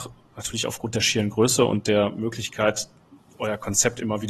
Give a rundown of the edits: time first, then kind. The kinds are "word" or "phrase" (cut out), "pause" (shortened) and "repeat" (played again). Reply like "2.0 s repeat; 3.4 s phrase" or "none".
none